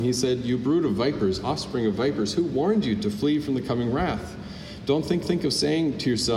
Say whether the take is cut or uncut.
cut